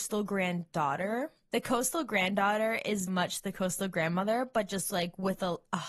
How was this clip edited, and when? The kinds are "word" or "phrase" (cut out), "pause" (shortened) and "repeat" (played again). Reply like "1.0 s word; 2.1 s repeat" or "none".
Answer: 3.1 s word